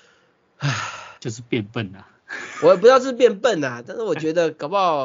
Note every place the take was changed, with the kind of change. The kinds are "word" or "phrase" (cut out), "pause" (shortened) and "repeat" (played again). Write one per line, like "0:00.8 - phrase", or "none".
0:01.2 - pause
0:02.2 - pause